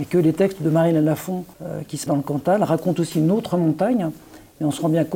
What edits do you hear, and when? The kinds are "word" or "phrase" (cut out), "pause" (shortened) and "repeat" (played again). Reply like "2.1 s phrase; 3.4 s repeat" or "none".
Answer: 1.5 s pause; 2.1 s word